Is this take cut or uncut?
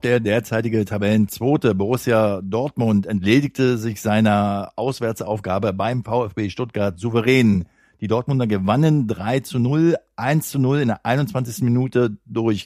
uncut